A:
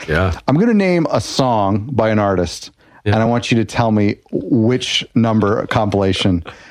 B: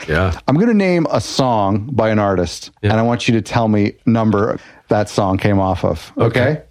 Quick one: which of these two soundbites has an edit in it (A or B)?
B